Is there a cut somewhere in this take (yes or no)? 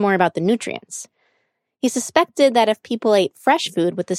no